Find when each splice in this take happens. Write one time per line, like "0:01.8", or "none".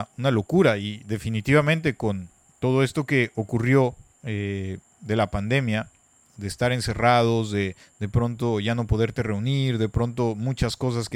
none

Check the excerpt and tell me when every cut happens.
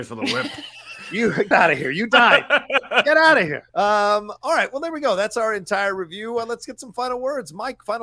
0:01.5
0:03.7

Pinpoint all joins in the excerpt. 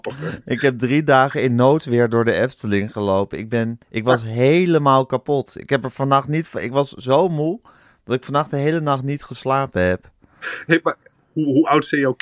0:03.8

